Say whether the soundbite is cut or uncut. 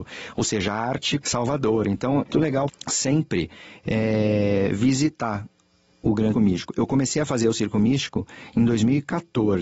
cut